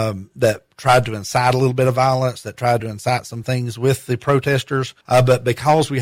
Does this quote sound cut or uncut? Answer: uncut